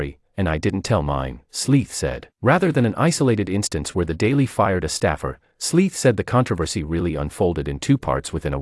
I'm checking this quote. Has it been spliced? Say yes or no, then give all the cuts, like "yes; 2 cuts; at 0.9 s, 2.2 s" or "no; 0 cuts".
yes; 1 cut; at 2.3 s